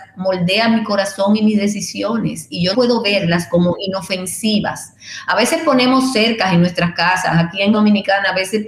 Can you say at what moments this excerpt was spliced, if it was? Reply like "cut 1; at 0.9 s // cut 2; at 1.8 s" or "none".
cut 1; at 2.7 s // cut 2; at 7.7 s